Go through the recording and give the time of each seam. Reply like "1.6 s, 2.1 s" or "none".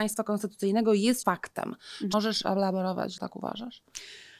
1.2 s, 2.1 s, 3.2 s